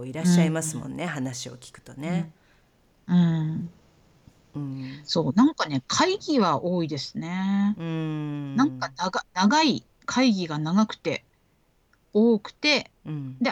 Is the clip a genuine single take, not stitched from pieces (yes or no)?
yes